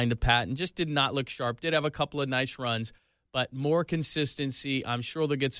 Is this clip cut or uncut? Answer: uncut